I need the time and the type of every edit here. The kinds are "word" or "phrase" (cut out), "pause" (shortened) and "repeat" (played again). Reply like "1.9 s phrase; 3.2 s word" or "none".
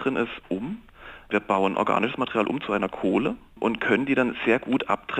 none